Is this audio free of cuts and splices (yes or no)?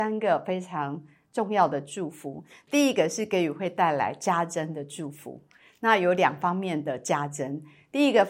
yes